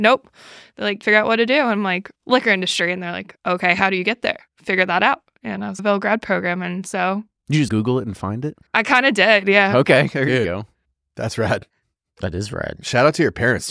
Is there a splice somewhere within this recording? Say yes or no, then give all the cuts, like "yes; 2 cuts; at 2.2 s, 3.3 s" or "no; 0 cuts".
yes; 5 cuts; at 1.0 s, 2.2 s, 5.8 s, 7.7 s, 8.7 s